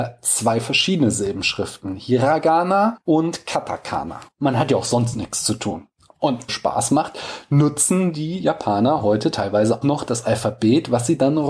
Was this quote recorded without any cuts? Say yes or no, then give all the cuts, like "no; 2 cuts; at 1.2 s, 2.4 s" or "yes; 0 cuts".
no; 2 cuts; at 6.5 s, 9.8 s